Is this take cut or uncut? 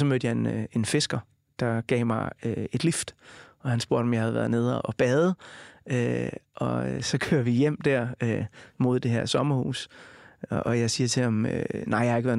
uncut